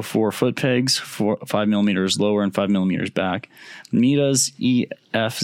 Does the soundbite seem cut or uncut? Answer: uncut